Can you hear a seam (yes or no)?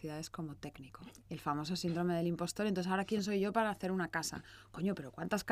yes